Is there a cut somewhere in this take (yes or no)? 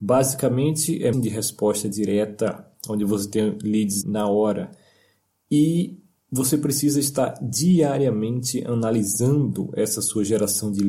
yes